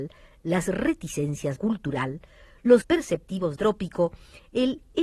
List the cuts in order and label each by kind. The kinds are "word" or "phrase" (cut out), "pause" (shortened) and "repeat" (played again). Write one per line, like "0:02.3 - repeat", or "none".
0:01.6 - phrase
0:02.8 - word
0:03.6 - word

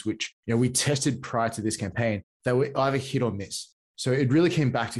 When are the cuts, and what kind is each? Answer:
none

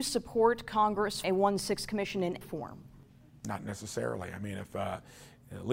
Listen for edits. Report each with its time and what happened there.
0:01.2 - word
0:02.4 - word

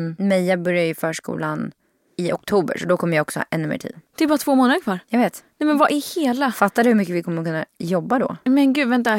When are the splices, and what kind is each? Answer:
none

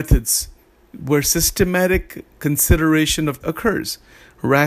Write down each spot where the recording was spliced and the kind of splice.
0:03.4 - word

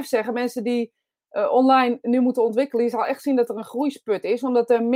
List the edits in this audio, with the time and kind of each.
none

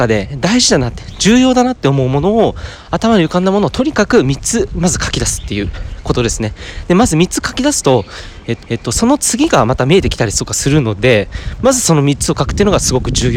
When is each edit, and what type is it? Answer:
0:08.6 - repeat

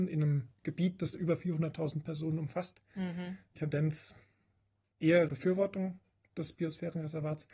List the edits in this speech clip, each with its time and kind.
0:01.1 - word
0:03.5 - phrase
0:05.3 - word

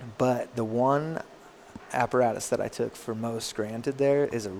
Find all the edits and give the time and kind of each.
none

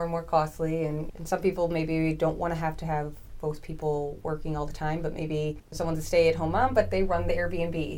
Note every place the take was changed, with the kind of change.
none

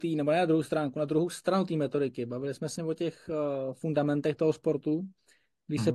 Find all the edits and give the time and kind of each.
0:02.8 - word

